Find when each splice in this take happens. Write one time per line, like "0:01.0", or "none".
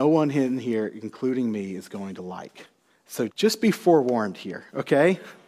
0:03.3